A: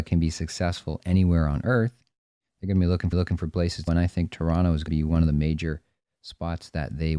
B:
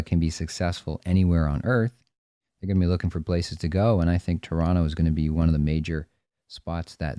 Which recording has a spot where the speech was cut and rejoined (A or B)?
A